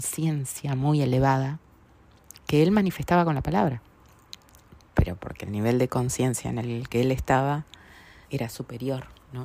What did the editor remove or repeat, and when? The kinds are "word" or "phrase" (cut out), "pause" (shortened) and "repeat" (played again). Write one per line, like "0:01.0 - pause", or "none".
0:08.2 - pause